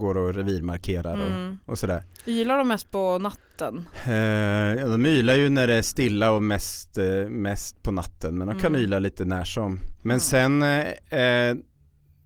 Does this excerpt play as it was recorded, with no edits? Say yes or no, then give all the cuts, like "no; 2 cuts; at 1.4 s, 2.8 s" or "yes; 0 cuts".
yes; 0 cuts